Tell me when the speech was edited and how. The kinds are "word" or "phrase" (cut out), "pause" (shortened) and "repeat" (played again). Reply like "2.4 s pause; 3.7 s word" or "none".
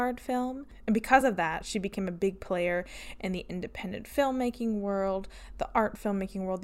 none